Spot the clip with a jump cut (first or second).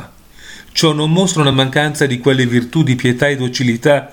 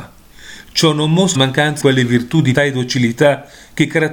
second